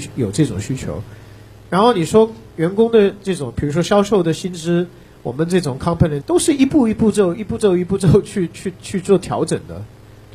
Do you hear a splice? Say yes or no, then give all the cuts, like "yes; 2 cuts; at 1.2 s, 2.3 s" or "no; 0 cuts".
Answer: yes; 1 cut; at 6.2 s